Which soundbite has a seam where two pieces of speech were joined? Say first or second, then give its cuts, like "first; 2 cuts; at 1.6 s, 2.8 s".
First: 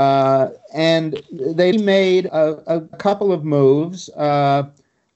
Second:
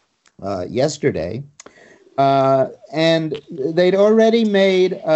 first; 3 cuts; at 1.7 s, 2.3 s, 2.9 s